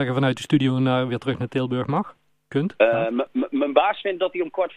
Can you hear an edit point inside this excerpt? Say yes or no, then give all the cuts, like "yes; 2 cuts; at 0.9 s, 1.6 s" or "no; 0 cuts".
no; 0 cuts